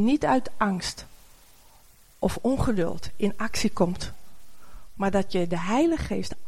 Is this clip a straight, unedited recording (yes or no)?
yes